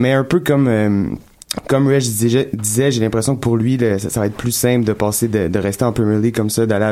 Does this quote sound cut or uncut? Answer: uncut